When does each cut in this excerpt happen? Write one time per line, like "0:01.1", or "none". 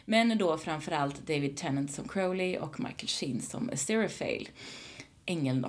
none